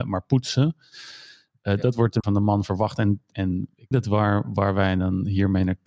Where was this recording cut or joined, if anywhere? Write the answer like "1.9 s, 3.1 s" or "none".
2.2 s, 3.3 s, 3.9 s